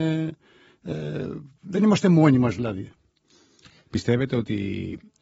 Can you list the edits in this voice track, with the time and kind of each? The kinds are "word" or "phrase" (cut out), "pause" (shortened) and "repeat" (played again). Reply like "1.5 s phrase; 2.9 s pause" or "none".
none